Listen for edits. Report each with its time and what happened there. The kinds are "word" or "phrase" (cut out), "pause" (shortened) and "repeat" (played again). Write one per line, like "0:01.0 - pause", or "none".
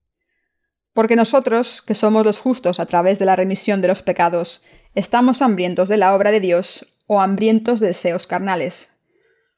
none